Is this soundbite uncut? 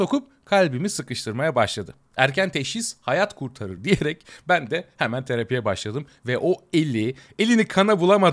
yes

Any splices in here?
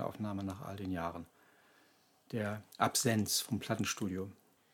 yes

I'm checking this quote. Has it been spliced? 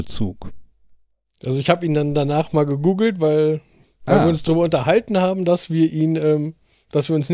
no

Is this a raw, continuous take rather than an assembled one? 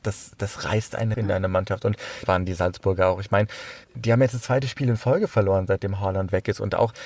no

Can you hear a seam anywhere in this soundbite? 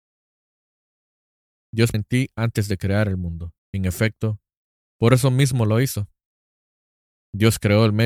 yes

